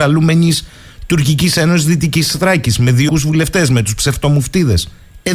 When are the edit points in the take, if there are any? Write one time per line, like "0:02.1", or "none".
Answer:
0:03.1